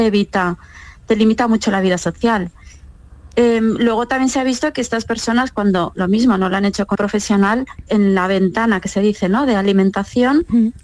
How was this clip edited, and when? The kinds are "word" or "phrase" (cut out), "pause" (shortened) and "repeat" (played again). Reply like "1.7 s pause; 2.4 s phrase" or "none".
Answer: 6.9 s word; 7.9 s word